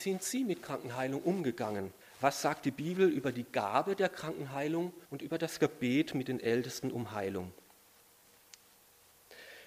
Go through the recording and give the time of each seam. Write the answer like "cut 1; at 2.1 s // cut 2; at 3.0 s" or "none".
cut 1; at 2.0 s // cut 2; at 5.1 s